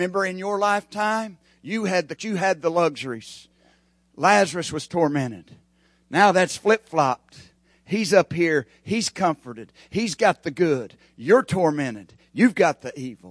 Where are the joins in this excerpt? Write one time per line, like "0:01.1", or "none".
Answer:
0:02.2